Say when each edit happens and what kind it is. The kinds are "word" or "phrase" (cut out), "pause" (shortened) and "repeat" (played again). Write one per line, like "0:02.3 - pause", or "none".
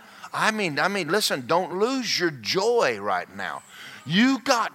none